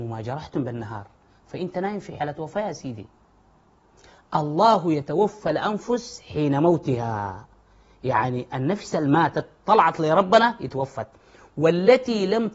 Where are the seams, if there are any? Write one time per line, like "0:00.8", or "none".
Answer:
none